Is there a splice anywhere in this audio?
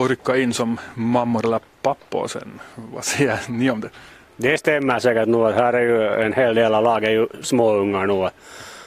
no; 0 cuts

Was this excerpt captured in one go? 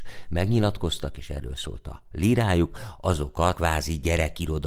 no; 1 cut; at 3.5 s

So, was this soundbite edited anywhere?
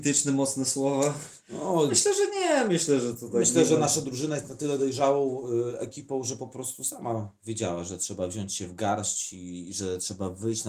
no; 0 cuts

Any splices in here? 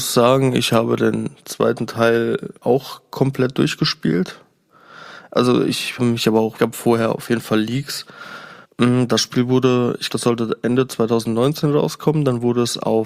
yes; 5 cuts; at 2.6 s, 6.0 s, 6.6 s, 8.6 s, 10.1 s

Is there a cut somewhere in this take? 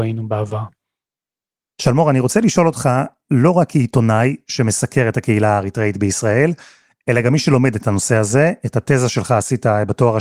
no; 0 cuts

